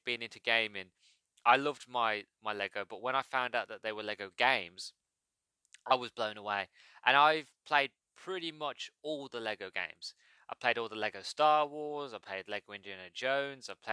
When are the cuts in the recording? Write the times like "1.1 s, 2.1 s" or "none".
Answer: none